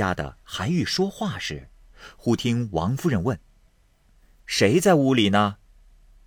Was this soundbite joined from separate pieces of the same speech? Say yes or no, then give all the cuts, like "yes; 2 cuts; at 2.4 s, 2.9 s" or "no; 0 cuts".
no; 0 cuts